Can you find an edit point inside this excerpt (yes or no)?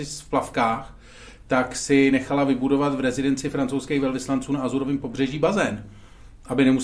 no